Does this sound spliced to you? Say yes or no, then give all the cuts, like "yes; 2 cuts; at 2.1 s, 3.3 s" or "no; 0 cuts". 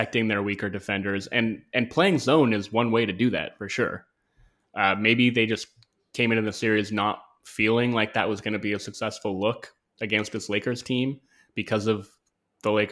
no; 0 cuts